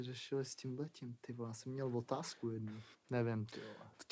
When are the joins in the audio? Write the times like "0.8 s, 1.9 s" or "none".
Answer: 2.9 s

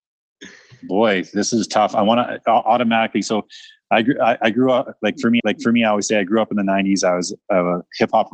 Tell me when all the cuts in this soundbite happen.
5.4 s

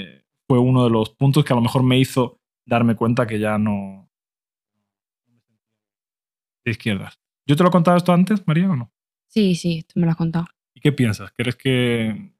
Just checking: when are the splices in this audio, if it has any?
none

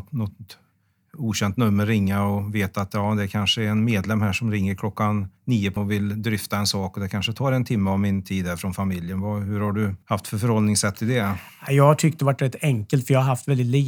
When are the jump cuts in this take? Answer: 5.4 s, 5.8 s, 10.0 s

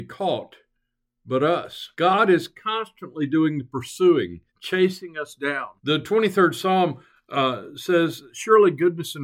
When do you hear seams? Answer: 1.9 s, 4.5 s, 5.8 s

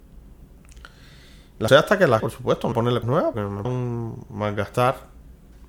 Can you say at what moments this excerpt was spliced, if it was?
1.7 s, 2.2 s, 2.7 s, 3.0 s, 3.3 s, 3.6 s

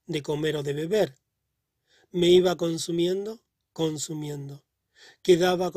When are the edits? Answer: none

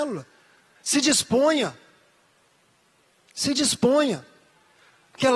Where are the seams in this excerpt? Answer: none

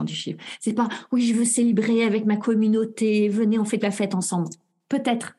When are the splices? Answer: 3.8 s

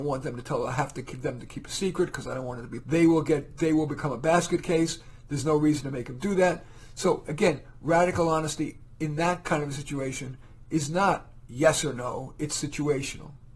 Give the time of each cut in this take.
2.8 s

